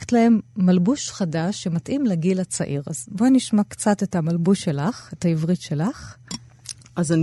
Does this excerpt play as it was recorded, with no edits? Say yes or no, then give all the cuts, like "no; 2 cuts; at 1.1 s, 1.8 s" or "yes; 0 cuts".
yes; 0 cuts